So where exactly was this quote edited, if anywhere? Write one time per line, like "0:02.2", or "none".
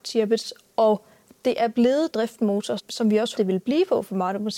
0:02.1
0:02.8
0:03.4